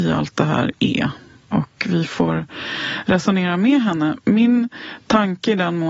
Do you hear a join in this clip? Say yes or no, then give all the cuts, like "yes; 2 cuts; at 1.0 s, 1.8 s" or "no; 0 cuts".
no; 0 cuts